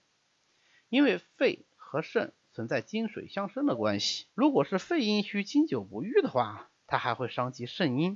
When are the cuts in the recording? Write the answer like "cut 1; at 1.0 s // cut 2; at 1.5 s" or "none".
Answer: cut 1; at 4.3 s // cut 2; at 6.8 s